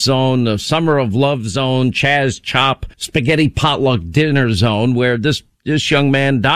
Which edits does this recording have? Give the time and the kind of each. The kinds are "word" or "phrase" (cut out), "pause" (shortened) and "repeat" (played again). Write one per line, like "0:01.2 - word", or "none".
0:02.9 - pause